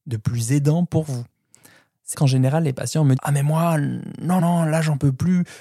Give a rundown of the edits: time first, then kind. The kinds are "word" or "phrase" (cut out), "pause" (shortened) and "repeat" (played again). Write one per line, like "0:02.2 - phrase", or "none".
0:02.1 - word
0:03.2 - word
0:04.4 - word

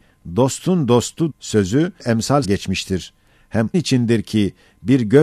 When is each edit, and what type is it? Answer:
0:01.3 - word
0:02.0 - word
0:02.4 - word
0:03.7 - word

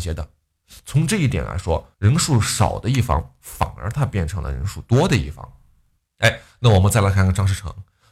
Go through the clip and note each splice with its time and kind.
0:01.9 - pause
0:06.0 - pause

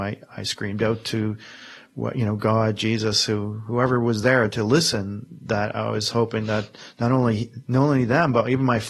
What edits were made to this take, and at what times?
none

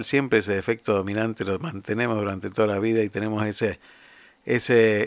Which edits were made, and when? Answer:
none

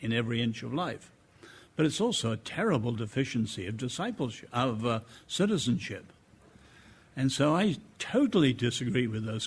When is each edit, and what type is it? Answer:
none

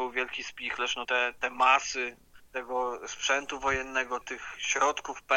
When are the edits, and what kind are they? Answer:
0:01.0 - word
0:01.4 - word
0:04.2 - phrase

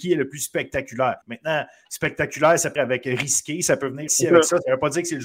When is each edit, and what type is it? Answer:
0:01.2 - pause
0:02.8 - word
0:04.1 - word

